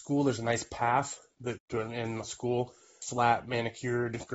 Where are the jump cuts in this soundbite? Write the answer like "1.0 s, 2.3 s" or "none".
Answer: 1.6 s, 2.2 s, 3.0 s